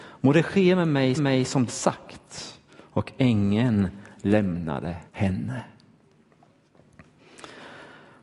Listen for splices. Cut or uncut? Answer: cut